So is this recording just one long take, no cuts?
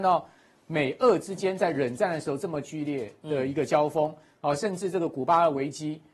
yes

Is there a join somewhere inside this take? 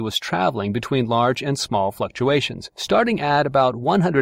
yes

